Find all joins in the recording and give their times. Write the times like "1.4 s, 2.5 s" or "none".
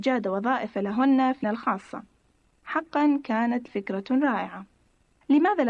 1.4 s, 3.7 s